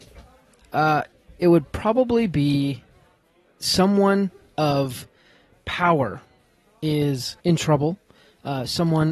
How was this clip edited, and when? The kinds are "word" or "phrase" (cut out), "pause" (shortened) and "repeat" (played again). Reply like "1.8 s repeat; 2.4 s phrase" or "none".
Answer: 7.4 s pause